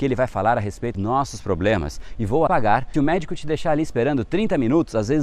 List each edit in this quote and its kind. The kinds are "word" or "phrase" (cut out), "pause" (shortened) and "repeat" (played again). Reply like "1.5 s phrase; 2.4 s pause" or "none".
0.9 s word; 2.5 s phrase; 2.9 s word

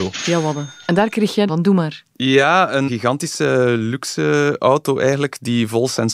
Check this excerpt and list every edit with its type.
1.5 s phrase; 2.9 s word

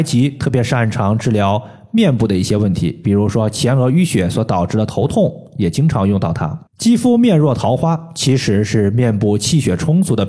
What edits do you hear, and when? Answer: 6.7 s pause

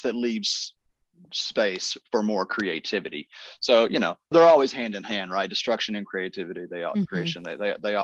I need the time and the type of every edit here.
4.3 s word

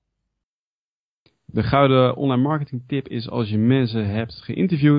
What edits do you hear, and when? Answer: none

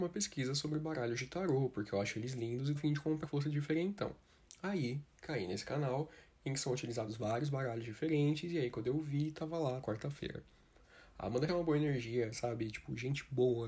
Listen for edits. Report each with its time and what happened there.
2.8 s word; 3.2 s word; 9.8 s word; 11.5 s word

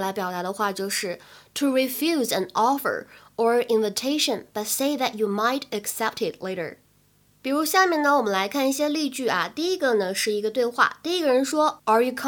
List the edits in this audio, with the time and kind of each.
none

